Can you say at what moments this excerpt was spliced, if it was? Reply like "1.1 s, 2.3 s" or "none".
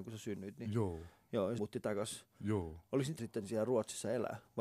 1.6 s, 3.2 s